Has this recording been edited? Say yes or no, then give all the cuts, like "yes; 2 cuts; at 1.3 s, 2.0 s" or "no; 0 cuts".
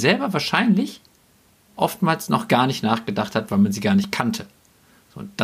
no; 0 cuts